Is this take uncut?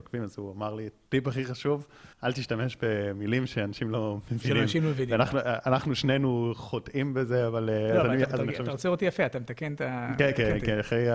no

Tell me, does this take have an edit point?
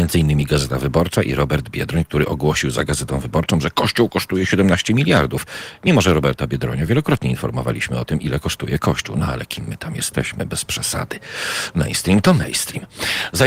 no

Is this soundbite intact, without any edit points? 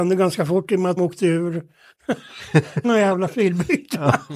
no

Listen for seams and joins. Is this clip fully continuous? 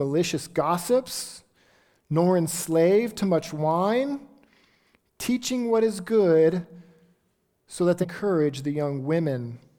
no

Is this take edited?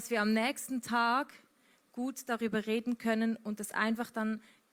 no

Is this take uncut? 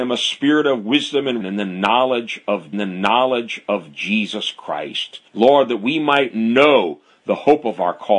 no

